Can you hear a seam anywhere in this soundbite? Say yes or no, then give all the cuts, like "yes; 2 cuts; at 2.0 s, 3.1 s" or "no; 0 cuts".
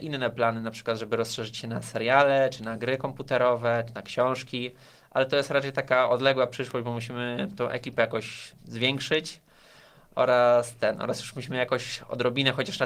no; 0 cuts